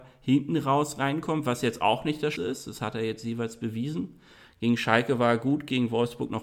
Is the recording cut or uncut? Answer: cut